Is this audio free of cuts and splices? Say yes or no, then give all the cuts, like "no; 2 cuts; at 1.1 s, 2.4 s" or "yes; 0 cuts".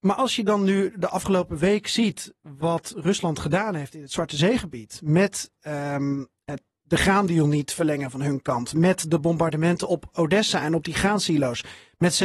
yes; 0 cuts